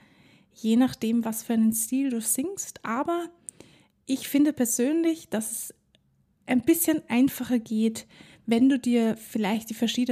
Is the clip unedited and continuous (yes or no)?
yes